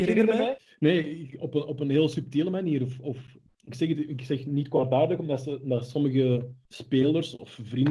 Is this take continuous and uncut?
no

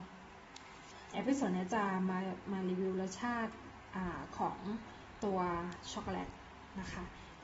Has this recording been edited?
yes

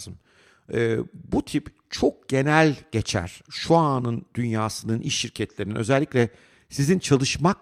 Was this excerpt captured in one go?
yes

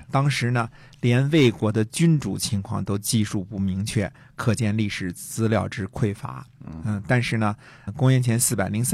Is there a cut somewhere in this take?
yes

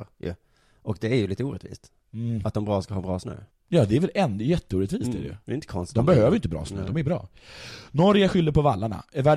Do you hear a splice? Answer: yes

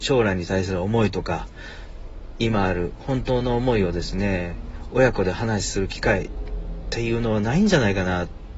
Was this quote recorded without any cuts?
yes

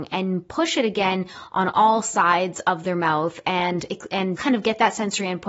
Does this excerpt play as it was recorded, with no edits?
no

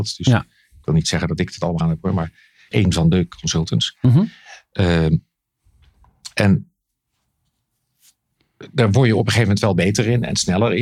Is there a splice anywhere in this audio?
yes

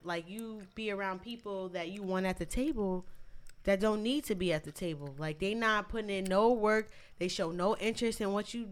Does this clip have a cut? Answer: no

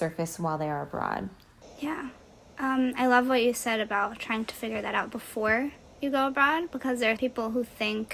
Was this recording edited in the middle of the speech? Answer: yes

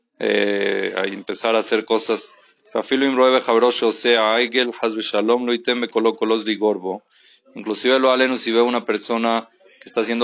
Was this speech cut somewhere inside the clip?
no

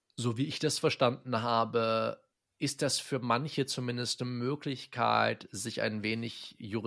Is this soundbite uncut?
no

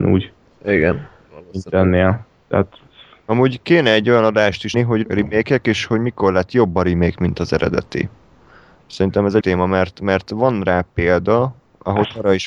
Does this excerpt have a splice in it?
yes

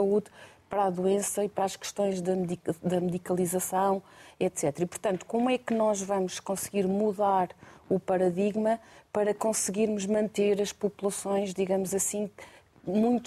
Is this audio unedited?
yes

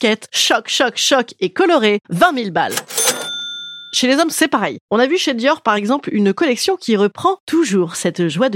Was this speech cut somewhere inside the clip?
no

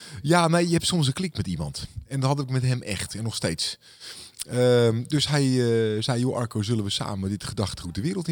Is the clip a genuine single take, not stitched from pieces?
yes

